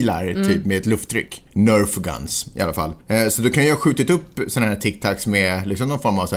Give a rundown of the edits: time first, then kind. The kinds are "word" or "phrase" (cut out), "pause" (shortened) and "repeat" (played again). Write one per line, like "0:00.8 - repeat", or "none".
0:01.5 - pause
0:03.0 - pause